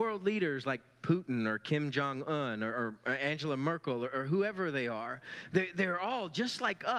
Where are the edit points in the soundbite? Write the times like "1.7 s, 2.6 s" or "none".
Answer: none